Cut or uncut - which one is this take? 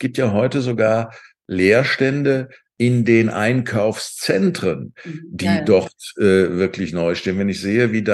uncut